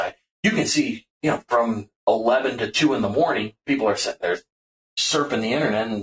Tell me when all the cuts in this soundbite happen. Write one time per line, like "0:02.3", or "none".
0:01.1